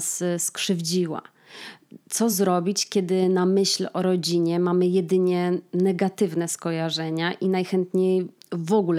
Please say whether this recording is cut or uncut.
uncut